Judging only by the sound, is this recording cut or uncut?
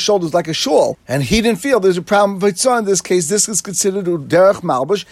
uncut